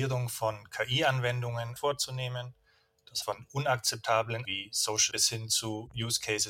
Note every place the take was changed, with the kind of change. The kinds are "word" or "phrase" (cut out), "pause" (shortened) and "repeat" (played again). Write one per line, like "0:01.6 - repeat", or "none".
0:01.8 - phrase
0:03.2 - word
0:04.4 - word
0:05.1 - word